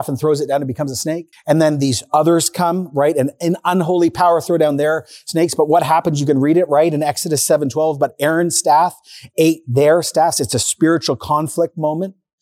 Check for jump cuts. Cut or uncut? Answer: cut